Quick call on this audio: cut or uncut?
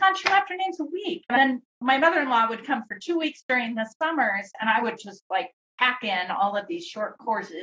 uncut